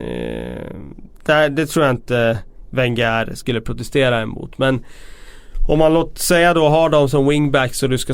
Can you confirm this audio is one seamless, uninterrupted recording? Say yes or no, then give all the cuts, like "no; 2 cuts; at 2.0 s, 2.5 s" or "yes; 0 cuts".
yes; 0 cuts